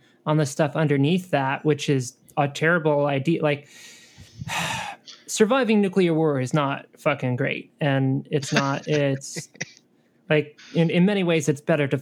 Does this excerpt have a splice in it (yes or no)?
yes